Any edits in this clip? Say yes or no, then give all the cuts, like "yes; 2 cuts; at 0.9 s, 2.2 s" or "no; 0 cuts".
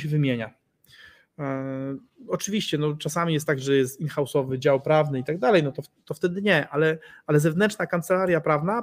no; 0 cuts